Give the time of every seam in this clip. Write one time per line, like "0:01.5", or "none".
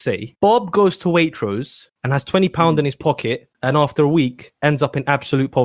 0:01.9
0:03.5
0:04.6